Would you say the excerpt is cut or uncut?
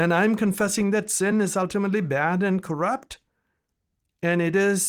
uncut